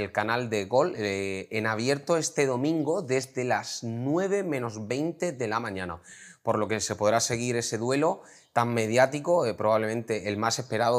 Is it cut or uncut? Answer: uncut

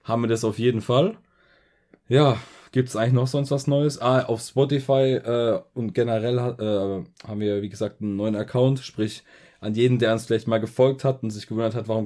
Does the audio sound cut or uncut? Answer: uncut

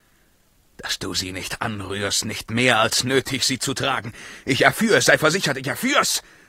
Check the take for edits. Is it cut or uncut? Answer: uncut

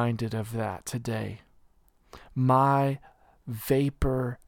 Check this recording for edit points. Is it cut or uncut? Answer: uncut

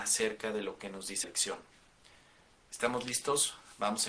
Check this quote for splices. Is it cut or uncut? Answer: cut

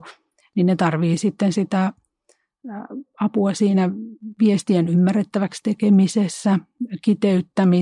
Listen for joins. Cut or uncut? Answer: uncut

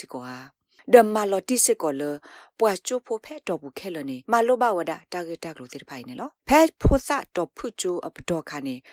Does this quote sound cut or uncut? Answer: cut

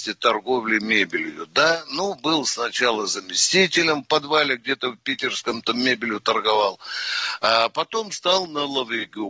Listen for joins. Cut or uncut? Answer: uncut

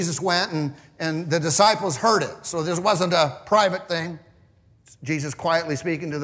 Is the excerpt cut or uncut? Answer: uncut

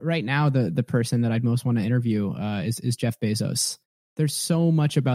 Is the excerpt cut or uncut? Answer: uncut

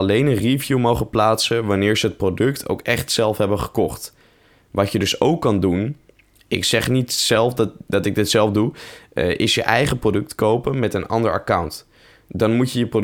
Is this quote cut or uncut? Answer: uncut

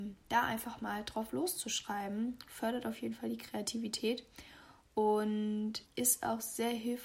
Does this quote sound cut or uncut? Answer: cut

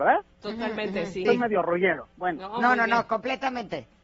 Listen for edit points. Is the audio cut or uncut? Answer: cut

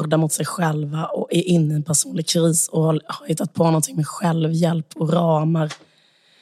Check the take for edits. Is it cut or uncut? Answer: uncut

